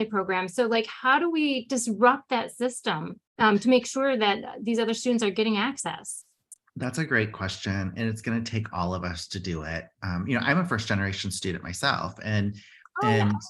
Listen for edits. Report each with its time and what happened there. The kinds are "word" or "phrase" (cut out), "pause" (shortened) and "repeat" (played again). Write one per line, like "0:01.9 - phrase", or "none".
0:03.3 - pause